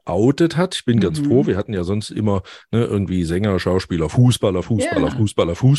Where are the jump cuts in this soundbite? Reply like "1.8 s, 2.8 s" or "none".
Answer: none